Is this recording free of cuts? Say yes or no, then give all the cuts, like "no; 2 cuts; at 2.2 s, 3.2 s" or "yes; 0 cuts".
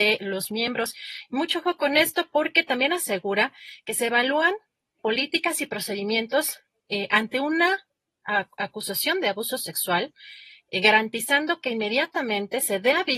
no; 1 cut; at 5.0 s